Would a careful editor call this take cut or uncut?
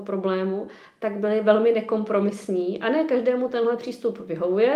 uncut